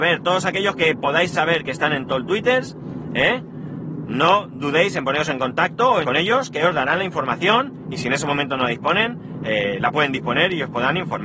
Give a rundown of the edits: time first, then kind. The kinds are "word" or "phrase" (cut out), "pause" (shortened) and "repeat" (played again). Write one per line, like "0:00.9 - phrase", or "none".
0:06.0 - word